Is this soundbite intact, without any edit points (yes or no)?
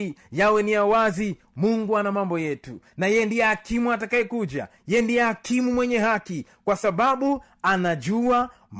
yes